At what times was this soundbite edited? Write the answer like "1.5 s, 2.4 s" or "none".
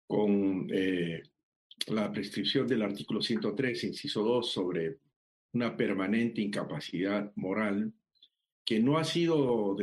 none